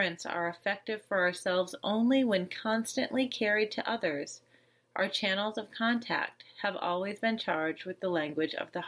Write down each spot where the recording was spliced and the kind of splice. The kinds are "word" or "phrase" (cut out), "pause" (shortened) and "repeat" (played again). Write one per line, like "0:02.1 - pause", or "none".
none